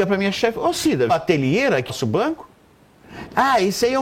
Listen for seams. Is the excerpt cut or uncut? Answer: cut